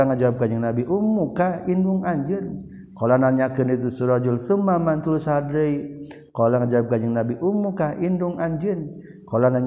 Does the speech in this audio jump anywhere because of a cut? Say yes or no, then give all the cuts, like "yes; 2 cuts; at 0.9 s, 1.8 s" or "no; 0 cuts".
no; 0 cuts